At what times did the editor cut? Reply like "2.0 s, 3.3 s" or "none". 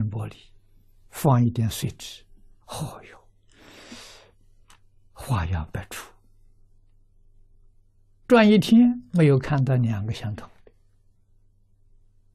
1.1 s, 2.6 s, 8.2 s